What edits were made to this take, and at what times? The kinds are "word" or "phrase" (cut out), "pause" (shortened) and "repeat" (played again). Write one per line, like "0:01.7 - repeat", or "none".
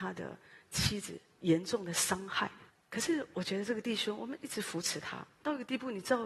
0:02.7 - pause

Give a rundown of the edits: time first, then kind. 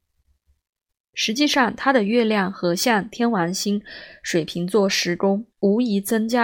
0:05.5 - pause

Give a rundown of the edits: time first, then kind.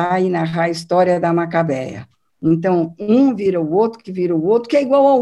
none

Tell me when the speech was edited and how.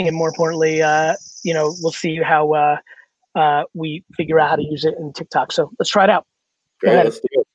none

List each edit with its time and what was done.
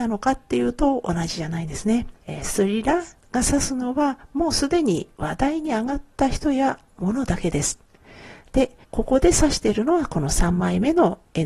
0:02.2 - pause
0:08.8 - pause

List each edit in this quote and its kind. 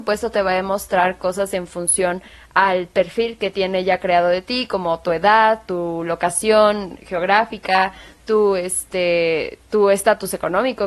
none

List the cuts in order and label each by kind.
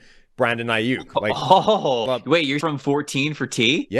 0:02.1 - word
0:02.6 - phrase

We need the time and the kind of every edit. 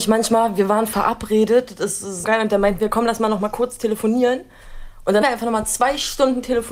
0:02.2 - word
0:05.2 - word

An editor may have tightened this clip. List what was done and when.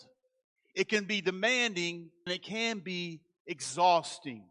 0:02.3 - word

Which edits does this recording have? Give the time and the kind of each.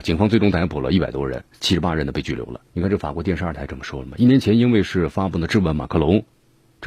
0:02.6 - pause

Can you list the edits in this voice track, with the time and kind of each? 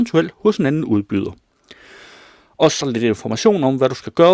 0:02.8 - word

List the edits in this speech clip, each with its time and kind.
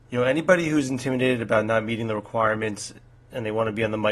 none

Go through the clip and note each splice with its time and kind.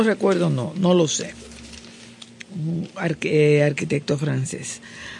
none

